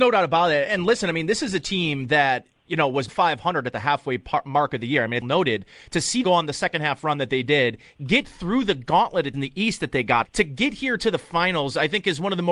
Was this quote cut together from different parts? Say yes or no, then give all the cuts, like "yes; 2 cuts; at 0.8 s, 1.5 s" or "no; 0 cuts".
yes; 5 cuts; at 3.1 s, 5.2 s, 6.2 s, 9.3 s, 10.3 s